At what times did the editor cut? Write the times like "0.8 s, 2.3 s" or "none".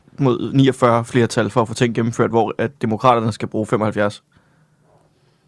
none